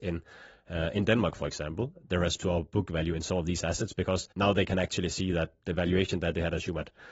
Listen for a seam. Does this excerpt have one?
yes; 2 cuts; at 2.4 s, 4.3 s

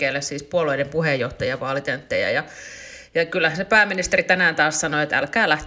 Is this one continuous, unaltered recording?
yes; 0 cuts

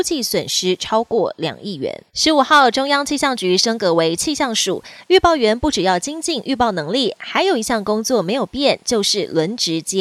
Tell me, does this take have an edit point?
yes; 1 cut; at 2.1 s

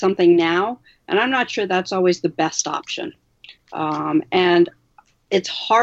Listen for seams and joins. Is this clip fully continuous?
yes; 0 cuts

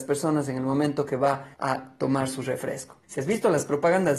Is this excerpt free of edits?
no; 2 cuts; at 1.5 s, 3.0 s

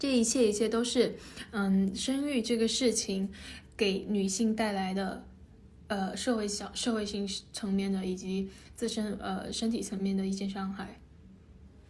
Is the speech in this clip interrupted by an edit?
no; 0 cuts

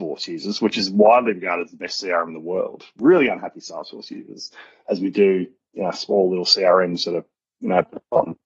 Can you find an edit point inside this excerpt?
no; 0 cuts

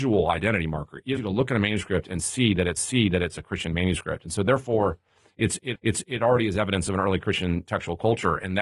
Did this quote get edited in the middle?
yes; 3 cuts; at 1.2 s, 2.8 s, 5.8 s

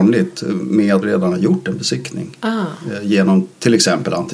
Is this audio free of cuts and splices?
no; 1 cut; at 1.0 s

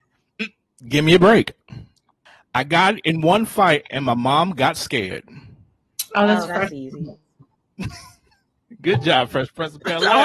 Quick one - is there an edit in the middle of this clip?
no; 0 cuts

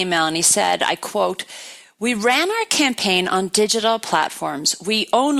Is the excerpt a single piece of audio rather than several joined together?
yes; 0 cuts

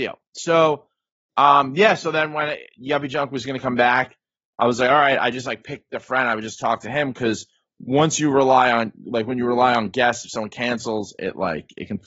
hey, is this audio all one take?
yes; 0 cuts

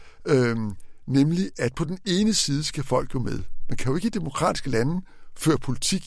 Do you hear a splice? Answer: no; 0 cuts

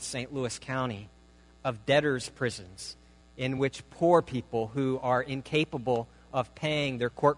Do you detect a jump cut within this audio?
no; 0 cuts

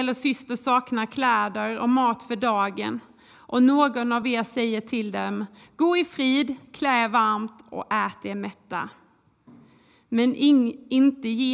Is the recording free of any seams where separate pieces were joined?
yes; 0 cuts

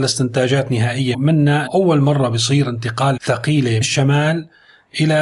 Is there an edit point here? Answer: yes; 4 cuts; at 1.1 s, 1.7 s, 3.2 s, 3.8 s

